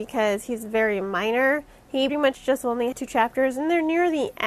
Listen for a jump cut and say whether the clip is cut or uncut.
cut